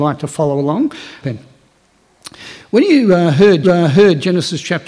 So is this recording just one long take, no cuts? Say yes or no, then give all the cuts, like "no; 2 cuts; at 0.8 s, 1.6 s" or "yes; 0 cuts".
no; 2 cuts; at 1.2 s, 3.6 s